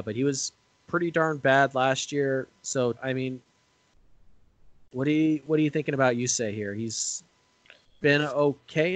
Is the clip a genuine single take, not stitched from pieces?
no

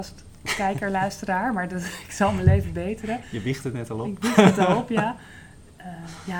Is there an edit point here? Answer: no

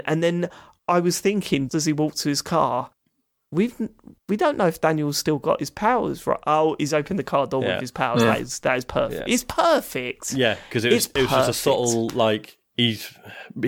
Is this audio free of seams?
no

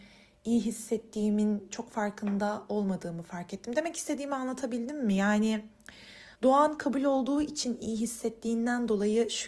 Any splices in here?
yes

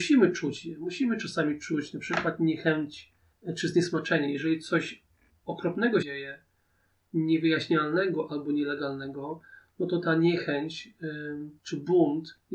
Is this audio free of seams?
no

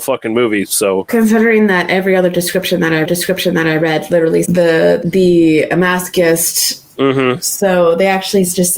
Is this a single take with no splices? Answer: no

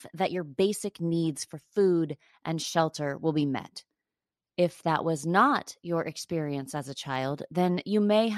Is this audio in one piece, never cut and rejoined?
yes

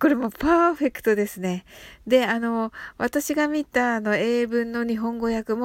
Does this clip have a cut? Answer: no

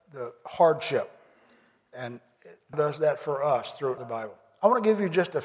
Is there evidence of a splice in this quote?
yes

